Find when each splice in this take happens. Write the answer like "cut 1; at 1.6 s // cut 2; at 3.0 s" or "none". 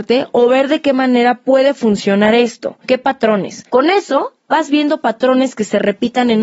none